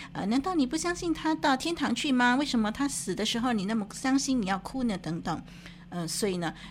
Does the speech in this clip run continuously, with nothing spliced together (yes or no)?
yes